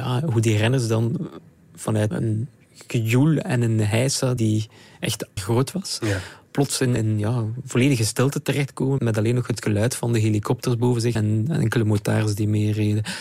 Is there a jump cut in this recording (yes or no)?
yes